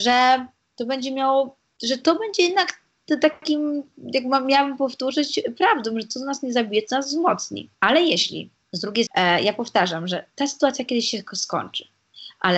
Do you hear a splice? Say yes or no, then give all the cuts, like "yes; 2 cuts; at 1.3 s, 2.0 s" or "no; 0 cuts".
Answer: yes; 2 cuts; at 7.7 s, 9.1 s